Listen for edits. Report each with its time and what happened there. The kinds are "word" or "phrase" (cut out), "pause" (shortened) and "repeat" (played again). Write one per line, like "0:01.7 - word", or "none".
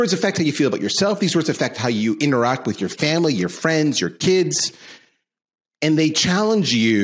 none